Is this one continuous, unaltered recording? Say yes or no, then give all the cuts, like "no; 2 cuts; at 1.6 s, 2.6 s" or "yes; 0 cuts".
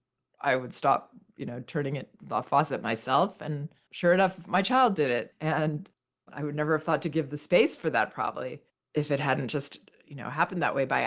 yes; 0 cuts